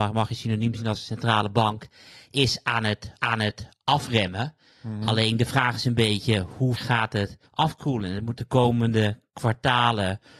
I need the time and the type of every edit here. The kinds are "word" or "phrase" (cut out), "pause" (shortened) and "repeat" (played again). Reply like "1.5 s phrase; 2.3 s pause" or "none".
3.2 s repeat; 6.8 s word; 7.5 s pause; 8.4 s word